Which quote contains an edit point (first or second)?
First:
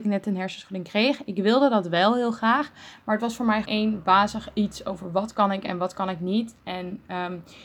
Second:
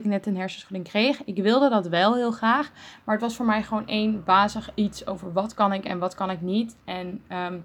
first